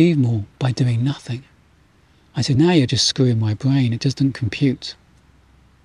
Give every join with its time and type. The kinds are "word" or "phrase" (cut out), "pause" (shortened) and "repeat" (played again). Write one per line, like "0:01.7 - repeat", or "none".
none

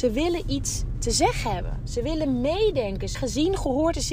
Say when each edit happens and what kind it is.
0:03.1 - word

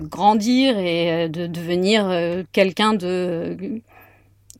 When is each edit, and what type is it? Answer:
0:02.5 - pause

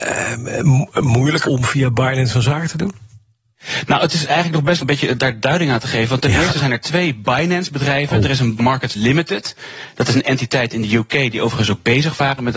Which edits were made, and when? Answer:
0:01.4 - phrase
0:04.8 - phrase
0:08.6 - word

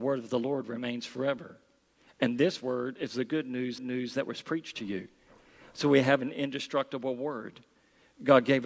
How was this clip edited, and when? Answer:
0:03.8 - repeat

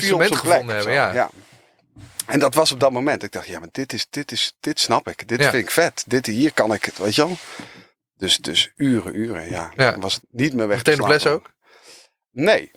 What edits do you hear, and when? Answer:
0:10.2 - word

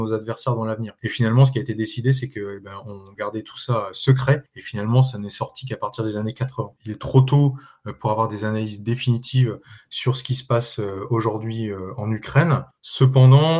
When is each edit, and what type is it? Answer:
0:06.8 - pause

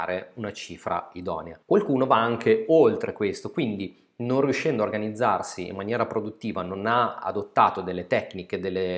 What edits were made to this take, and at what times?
0:01.6 - pause

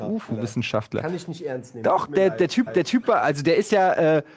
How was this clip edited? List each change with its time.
0:02.7 - repeat

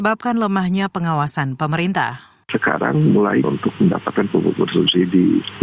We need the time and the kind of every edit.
0:03.4 - word

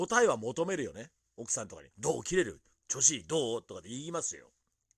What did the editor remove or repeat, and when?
0:01.9 - pause

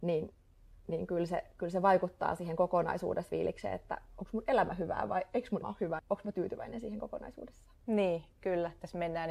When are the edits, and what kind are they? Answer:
0:03.3 - word
0:05.6 - word
0:06.0 - word

